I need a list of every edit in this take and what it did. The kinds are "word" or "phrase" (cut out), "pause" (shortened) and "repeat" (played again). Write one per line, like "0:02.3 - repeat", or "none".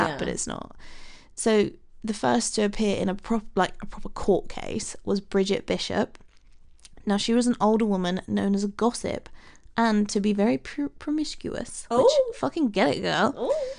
none